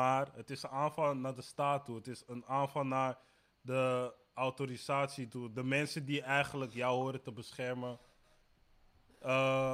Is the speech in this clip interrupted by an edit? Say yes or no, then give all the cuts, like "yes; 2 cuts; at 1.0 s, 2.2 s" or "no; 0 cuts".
no; 0 cuts